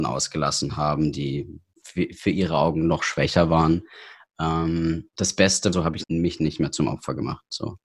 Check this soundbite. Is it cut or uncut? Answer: cut